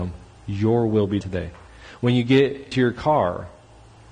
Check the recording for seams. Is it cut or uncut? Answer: cut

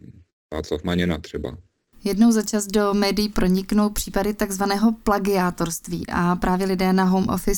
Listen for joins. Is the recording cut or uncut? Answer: uncut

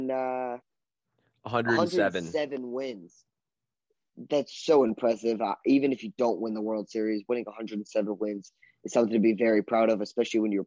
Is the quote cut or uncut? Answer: uncut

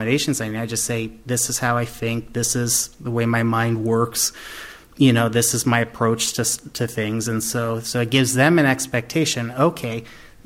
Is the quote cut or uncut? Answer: uncut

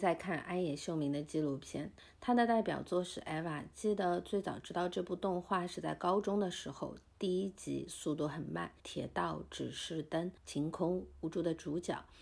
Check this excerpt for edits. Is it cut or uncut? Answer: cut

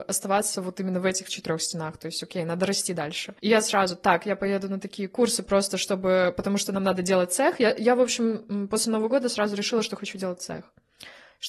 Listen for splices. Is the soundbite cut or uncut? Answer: cut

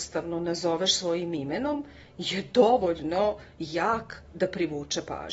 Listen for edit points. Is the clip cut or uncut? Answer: uncut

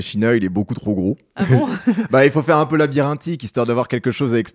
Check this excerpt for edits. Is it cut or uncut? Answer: uncut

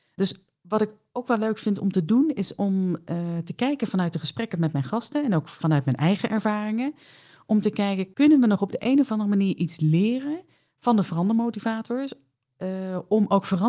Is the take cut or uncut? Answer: uncut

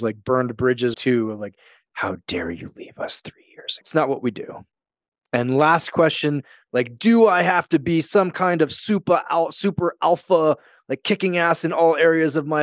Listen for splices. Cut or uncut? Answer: cut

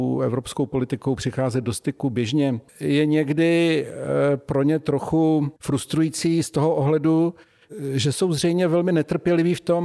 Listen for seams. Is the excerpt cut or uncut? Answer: cut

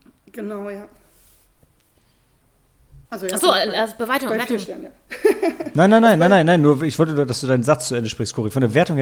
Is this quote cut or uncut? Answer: cut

